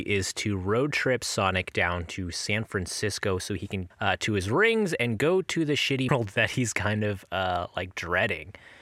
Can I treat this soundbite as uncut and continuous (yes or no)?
no